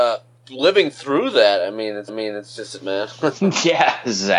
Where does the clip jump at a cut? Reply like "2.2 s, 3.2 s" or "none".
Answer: 2.1 s, 2.8 s